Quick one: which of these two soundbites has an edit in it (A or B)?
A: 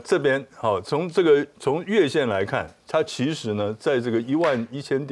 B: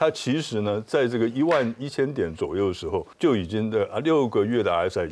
B